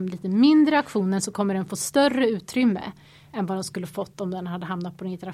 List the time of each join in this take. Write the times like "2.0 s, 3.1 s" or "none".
none